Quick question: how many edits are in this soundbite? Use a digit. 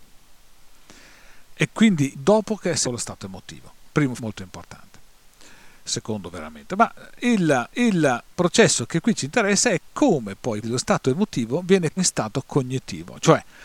6